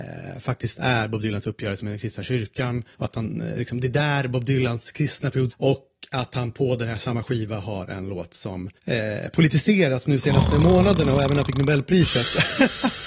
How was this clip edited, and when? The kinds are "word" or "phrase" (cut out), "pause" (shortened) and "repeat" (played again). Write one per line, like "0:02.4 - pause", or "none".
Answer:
0:02.9 - pause
0:05.5 - word
0:08.8 - pause